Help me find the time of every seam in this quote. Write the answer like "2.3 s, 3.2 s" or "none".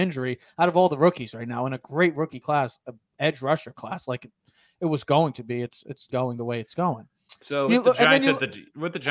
6.1 s, 7.7 s